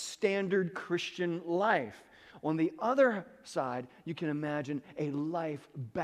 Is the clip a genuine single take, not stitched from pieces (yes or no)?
yes